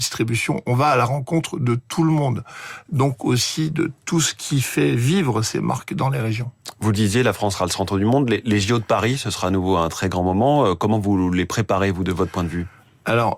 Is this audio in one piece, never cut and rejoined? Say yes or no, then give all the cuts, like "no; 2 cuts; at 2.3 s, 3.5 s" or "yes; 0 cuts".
yes; 0 cuts